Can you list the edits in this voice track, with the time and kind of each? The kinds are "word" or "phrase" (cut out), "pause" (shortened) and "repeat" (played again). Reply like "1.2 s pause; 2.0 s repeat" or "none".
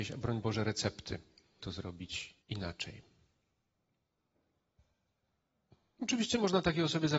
1.6 s word; 2.4 s pause